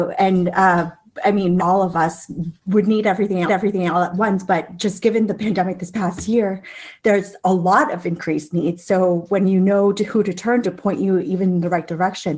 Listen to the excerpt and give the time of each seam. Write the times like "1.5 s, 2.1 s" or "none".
1.6 s, 2.6 s, 3.5 s, 10.6 s